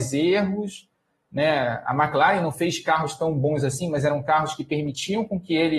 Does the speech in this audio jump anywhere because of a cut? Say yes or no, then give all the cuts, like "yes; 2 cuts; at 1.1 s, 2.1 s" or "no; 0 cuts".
no; 0 cuts